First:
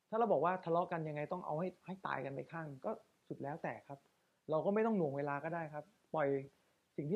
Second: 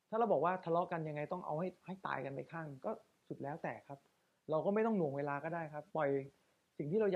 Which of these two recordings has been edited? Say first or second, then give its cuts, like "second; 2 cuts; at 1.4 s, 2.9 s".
second; 1 cut; at 5.9 s